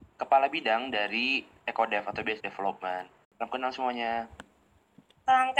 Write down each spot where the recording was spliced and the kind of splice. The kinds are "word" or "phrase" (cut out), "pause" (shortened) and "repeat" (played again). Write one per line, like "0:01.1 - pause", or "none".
0:02.4 - phrase

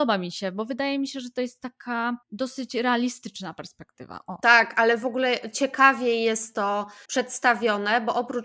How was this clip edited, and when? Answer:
0:02.2 - pause
0:07.0 - pause

